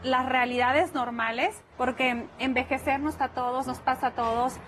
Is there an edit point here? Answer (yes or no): yes